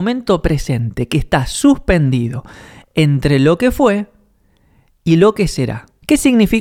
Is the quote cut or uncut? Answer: uncut